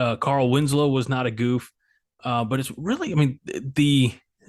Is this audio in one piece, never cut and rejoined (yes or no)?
yes